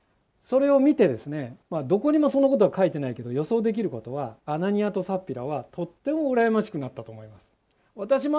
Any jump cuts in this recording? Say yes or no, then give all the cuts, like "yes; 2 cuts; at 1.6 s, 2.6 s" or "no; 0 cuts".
yes; 2 cuts; at 1.6 s, 4.4 s